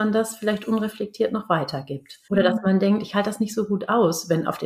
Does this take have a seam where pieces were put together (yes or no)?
yes